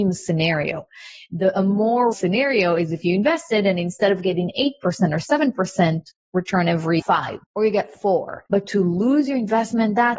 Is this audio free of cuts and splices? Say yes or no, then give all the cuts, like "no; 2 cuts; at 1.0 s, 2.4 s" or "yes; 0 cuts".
no; 4 cuts; at 2.1 s, 7.0 s, 7.4 s, 8.5 s